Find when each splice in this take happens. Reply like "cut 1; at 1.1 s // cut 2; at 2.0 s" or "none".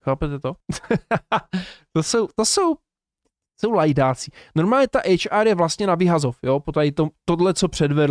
none